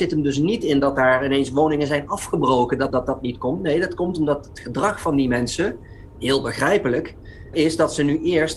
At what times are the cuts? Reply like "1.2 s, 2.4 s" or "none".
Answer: 2.9 s, 7.5 s